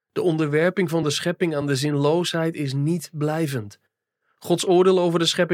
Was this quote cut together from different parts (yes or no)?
no